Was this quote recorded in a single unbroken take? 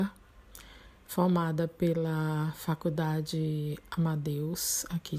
yes; 0 cuts

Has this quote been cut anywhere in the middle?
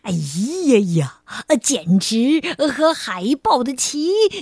no; 0 cuts

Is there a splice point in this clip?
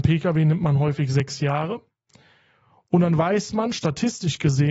no; 0 cuts

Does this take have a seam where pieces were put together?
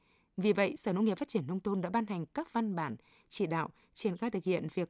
no; 0 cuts

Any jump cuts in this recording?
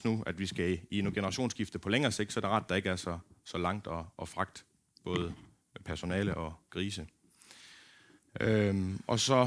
no; 0 cuts

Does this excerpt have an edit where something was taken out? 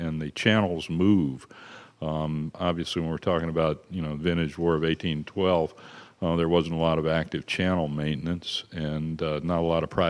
no; 0 cuts

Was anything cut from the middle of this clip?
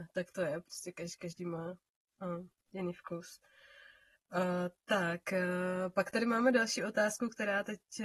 no; 0 cuts

